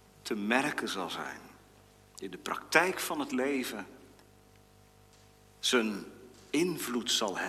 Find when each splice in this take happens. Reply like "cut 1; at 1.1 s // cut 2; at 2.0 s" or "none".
none